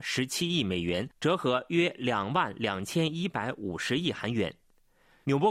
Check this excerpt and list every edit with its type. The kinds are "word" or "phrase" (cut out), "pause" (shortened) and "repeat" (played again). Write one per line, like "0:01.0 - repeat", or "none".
0:01.1 - pause